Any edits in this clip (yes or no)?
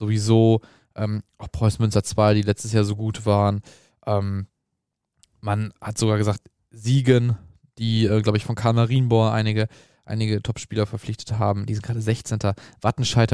no